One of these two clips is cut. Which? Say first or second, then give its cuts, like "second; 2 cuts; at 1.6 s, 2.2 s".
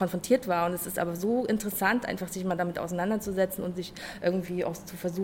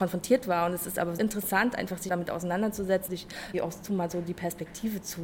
second; 5 cuts; at 1.2 s, 2.1 s, 3.1 s, 3.5 s, 3.9 s